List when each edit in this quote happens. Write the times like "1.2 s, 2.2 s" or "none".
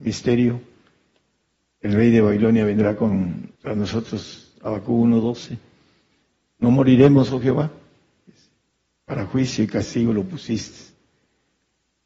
3.5 s